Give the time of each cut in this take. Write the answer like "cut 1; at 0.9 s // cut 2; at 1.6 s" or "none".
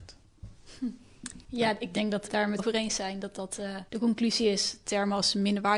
cut 1; at 1.4 s // cut 2; at 2.3 s // cut 3; at 2.6 s // cut 4; at 3.9 s